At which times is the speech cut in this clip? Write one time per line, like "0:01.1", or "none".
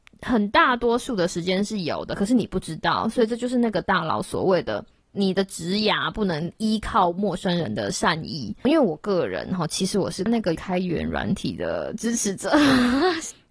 0:05.0